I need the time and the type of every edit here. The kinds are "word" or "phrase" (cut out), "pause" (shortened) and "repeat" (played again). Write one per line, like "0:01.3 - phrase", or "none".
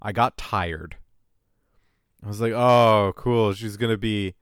none